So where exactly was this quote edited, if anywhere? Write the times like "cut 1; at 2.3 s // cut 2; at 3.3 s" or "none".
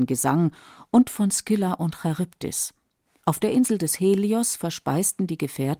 none